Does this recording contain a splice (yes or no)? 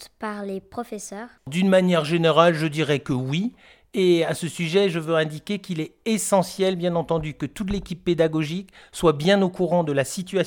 no